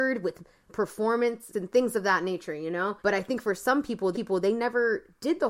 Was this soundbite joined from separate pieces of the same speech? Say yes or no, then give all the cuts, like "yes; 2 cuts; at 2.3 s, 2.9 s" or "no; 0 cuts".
yes; 3 cuts; at 1.5 s, 3.0 s, 4.1 s